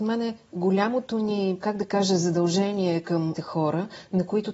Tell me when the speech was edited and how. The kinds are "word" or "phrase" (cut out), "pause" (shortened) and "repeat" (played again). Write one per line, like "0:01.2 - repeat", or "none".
0:01.6 - word
0:03.3 - word